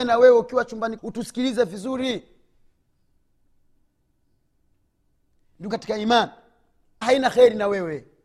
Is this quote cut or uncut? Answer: cut